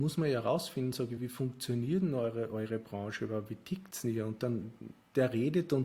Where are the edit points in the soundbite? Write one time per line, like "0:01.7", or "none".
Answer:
0:01.2